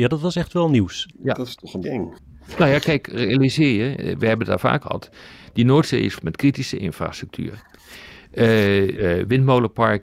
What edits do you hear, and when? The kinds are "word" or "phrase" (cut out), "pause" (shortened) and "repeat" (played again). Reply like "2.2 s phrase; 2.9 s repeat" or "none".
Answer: 1.8 s word; 4.8 s word; 6.2 s word; 8.9 s word